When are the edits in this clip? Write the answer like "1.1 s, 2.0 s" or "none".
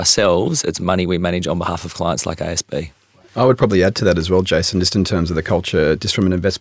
none